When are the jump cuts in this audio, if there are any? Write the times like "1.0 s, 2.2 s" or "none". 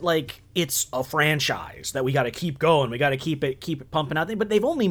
none